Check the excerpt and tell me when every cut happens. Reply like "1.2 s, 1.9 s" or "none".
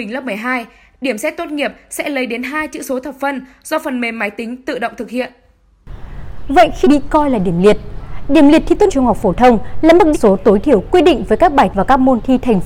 6.8 s, 8.9 s, 10.1 s, 11.7 s